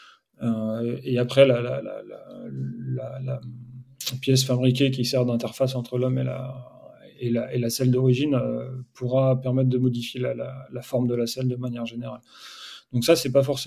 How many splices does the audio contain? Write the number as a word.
zero